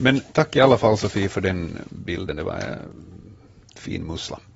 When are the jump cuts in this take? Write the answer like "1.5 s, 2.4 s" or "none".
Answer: none